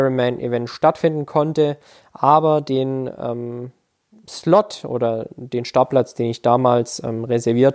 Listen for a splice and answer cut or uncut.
uncut